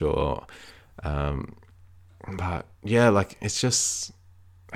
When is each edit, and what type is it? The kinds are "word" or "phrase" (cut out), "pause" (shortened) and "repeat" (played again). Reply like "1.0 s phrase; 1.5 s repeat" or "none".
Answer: 2.7 s pause